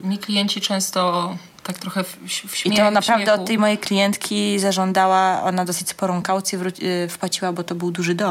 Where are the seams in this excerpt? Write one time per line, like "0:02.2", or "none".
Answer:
none